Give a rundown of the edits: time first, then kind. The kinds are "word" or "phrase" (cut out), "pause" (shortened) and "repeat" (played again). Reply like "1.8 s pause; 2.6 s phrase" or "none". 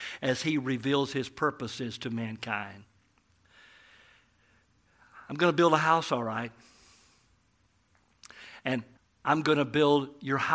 9.0 s pause

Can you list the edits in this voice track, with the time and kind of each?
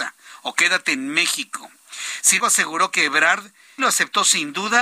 2.4 s word; 3.8 s word

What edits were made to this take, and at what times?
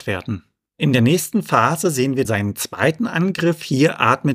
2.2 s word

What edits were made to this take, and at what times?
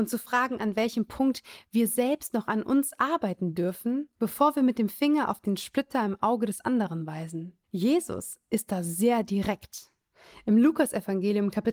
4.1 s pause; 7.6 s pause

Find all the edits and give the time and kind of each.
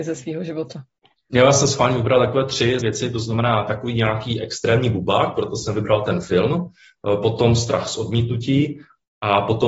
2.8 s word

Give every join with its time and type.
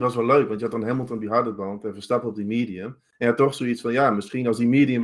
none

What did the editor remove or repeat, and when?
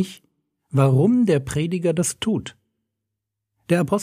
none

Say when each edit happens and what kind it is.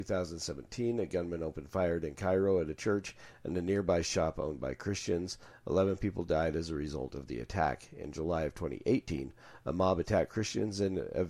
none

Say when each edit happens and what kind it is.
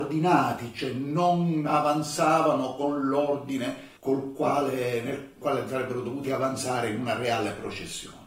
4.0 s pause; 5.4 s word

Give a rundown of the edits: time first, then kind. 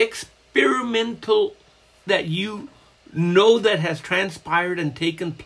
2.1 s phrase; 3.0 s pause

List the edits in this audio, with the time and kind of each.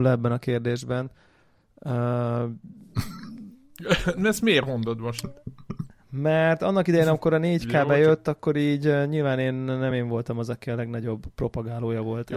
none

